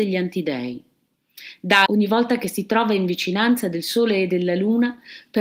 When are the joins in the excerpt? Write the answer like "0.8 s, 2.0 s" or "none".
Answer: 1.9 s